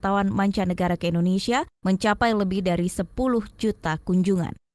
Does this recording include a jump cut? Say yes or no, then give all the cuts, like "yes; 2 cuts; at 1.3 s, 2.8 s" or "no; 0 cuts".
no; 0 cuts